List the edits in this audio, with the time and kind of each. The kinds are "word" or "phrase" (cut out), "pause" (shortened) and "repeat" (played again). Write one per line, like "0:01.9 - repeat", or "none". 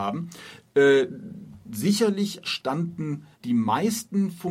0:02.4 - word
0:03.3 - pause